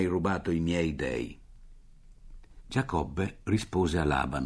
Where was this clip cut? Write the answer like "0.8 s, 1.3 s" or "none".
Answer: none